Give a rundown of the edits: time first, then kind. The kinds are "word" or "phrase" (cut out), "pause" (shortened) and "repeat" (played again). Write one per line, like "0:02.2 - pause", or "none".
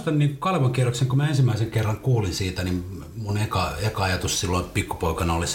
none